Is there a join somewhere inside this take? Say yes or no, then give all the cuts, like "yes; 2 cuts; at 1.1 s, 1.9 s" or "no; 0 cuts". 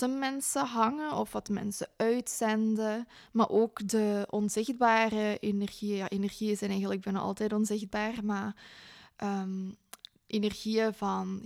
no; 0 cuts